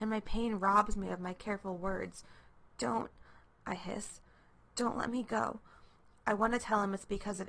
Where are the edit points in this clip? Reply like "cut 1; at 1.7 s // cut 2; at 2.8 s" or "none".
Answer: none